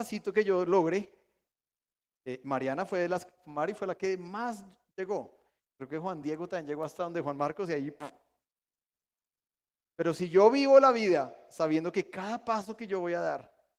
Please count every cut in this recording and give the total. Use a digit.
0